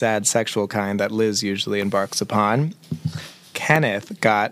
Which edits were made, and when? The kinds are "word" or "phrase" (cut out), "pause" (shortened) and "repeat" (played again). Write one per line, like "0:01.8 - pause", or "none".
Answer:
none

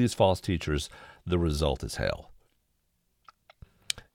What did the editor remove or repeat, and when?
none

